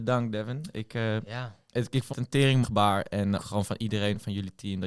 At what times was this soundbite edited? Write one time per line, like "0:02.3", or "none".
0:02.1
0:02.6
0:03.4